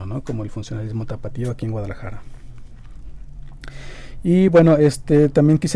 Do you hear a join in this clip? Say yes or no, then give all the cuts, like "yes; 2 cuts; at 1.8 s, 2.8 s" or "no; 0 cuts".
no; 0 cuts